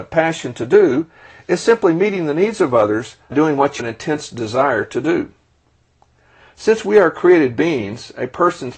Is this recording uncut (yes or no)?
no